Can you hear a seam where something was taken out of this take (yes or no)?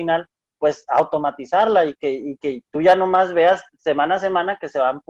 no